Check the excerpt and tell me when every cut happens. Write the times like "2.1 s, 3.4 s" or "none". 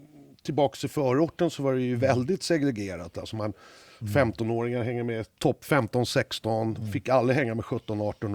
none